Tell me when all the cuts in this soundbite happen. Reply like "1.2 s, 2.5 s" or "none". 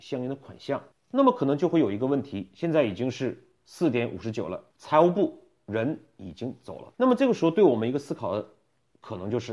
0.9 s, 4.7 s, 6.9 s